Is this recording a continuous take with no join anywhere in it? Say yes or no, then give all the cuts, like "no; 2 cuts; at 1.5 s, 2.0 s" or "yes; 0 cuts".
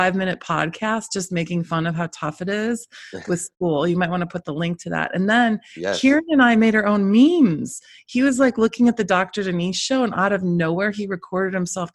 yes; 0 cuts